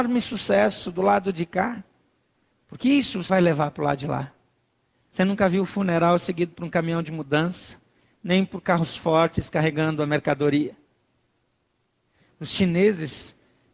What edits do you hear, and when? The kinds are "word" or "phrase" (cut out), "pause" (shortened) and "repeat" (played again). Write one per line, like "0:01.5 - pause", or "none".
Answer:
0:03.3 - word